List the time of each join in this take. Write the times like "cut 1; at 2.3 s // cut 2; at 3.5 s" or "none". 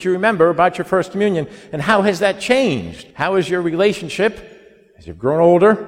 cut 1; at 3.1 s